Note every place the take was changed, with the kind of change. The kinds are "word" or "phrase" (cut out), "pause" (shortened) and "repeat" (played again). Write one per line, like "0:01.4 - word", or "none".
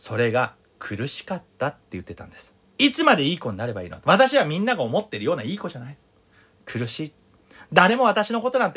0:02.6 - pause